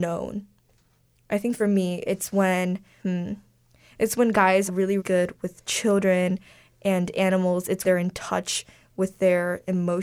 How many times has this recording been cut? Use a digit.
5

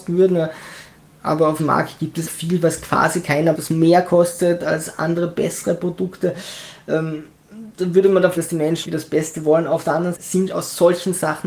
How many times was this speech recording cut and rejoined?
7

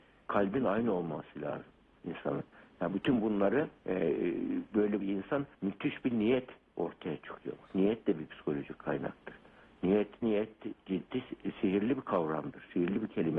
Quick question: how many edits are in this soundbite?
4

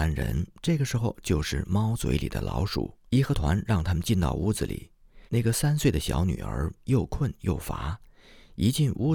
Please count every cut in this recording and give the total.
2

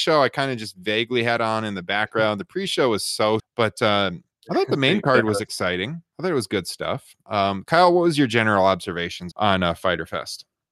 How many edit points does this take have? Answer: 2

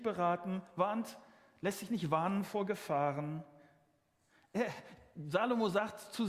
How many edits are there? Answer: 0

